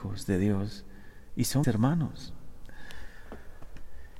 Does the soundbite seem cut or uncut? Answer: cut